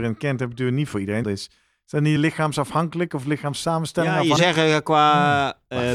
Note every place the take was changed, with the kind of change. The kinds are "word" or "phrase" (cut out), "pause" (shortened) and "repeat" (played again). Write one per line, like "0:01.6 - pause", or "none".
0:01.2 - word
0:02.2 - phrase
0:04.4 - word